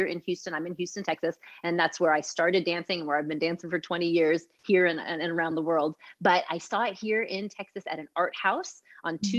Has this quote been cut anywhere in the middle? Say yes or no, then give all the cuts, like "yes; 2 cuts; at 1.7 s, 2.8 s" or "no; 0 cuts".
no; 0 cuts